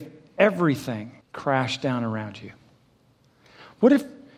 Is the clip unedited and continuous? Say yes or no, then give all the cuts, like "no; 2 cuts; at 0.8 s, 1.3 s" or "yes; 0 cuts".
no; 1 cut; at 1.2 s